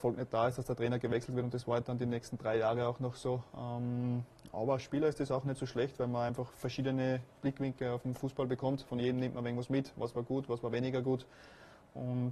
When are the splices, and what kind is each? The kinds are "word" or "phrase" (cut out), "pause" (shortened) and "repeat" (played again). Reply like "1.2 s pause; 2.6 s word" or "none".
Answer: none